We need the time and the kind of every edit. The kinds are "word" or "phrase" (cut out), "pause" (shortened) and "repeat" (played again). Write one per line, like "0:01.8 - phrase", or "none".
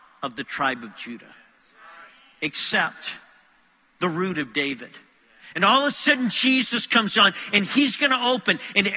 none